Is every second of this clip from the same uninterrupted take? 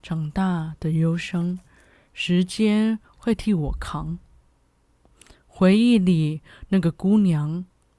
yes; 0 cuts

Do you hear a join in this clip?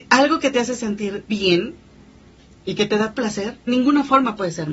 yes; 3 cuts; at 1.3 s, 3.2 s, 3.7 s

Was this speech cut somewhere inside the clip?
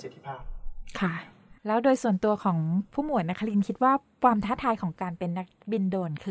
yes; 1 cut; at 1.6 s

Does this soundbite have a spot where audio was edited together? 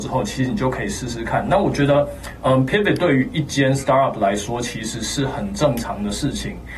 no; 0 cuts

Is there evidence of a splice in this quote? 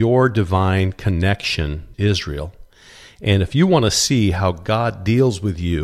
yes; 1 cut; at 1.9 s

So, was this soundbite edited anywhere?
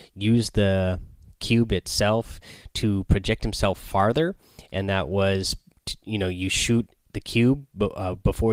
no; 0 cuts

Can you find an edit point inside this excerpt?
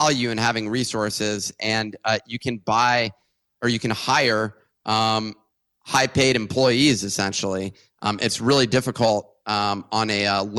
no; 0 cuts

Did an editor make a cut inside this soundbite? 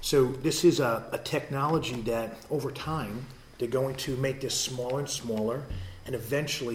no; 0 cuts

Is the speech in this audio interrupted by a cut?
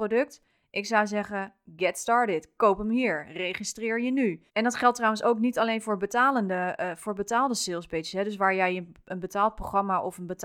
yes; 1 cut; at 4.5 s

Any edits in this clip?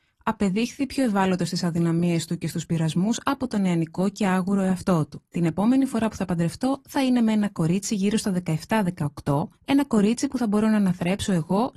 yes; 2 cuts; at 5.3 s, 9.5 s

